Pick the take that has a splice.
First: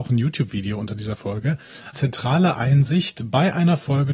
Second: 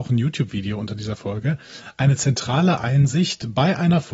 first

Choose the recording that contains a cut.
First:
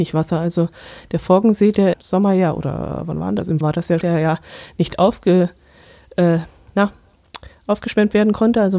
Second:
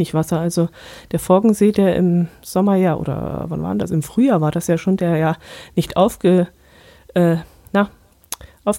first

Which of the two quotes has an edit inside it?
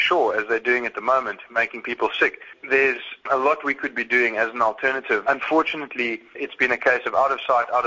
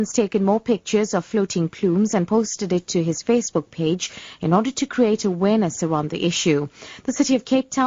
first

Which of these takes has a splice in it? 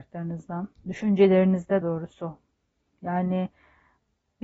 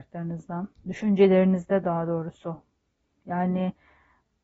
first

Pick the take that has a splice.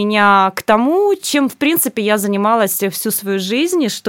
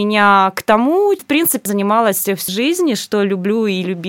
second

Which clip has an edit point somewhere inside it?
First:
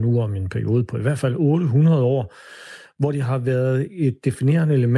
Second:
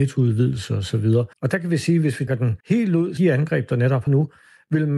second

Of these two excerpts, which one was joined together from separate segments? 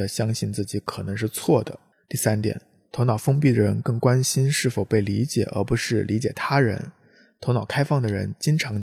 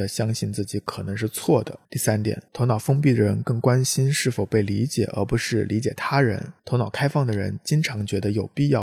second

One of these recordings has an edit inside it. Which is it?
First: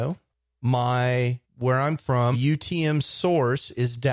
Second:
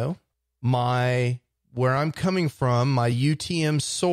first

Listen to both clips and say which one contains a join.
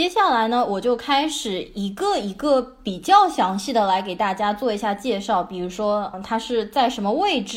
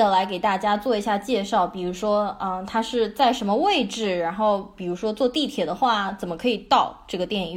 first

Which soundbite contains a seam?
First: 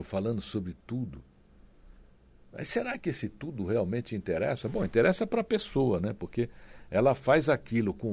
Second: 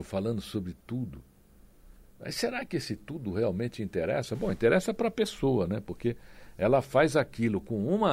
second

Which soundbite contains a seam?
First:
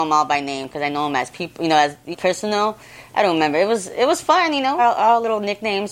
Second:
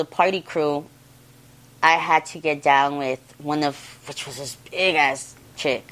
first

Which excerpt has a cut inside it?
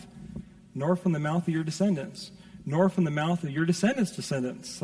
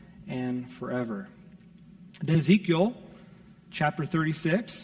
second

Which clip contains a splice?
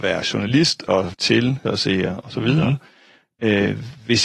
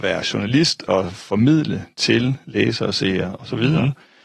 first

